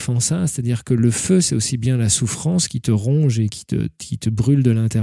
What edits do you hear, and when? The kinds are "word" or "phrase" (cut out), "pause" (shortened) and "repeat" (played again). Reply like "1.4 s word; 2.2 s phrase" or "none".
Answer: none